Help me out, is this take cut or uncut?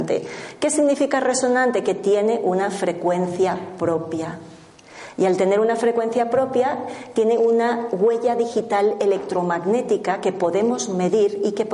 uncut